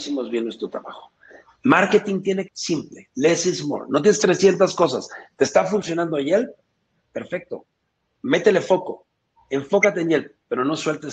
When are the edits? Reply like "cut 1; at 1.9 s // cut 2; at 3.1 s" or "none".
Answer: cut 1; at 2.5 s // cut 2; at 4.2 s

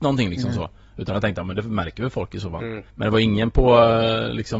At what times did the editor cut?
cut 1; at 2.9 s

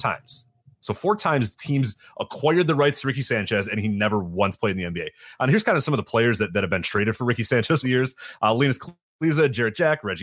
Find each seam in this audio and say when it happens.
cut 1; at 7.8 s

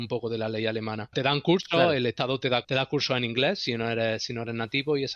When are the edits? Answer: cut 1; at 1.1 s // cut 2; at 2.6 s

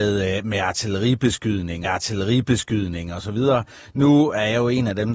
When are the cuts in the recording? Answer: cut 1; at 1.8 s

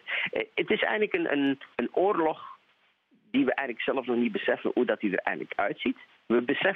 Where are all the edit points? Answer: cut 1; at 1.7 s

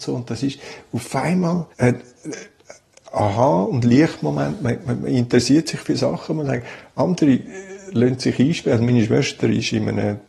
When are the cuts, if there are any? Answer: cut 1; at 1.7 s

